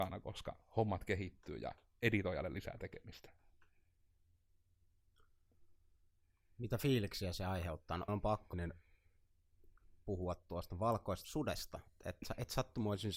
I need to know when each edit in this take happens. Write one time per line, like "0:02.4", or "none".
0:08.1
0:08.5
0:11.2